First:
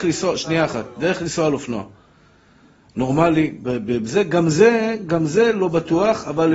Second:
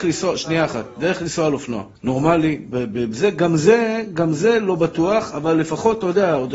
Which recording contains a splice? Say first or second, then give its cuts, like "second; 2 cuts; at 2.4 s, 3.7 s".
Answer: second; 1 cut; at 2.0 s